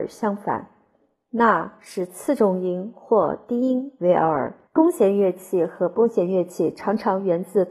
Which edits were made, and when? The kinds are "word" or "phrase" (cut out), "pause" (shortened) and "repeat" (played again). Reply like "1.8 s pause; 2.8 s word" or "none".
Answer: 4.7 s pause